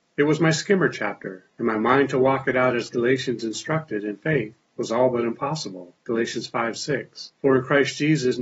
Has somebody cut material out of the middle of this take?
yes; 4 cuts; at 1.5 s, 4.6 s, 6.0 s, 7.3 s

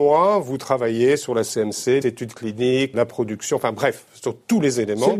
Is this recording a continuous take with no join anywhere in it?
no; 2 cuts; at 2.0 s, 2.9 s

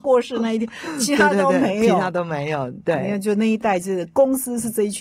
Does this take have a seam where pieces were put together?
no; 0 cuts

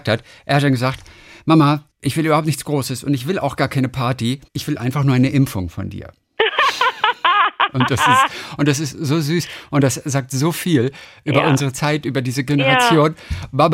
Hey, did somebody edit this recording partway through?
yes; 2 cuts; at 1.9 s, 4.5 s

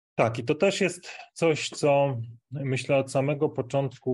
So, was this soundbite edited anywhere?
yes; 1 cut; at 2.4 s

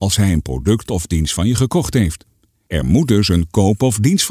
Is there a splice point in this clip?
no; 0 cuts

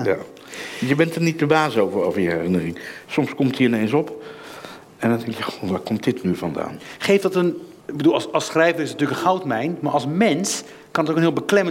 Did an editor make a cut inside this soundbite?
yes; 1 cut; at 7.8 s

